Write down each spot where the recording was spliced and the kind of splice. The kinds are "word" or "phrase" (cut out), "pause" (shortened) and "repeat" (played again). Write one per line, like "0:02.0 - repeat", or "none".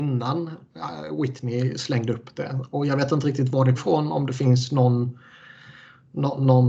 0:03.7 - word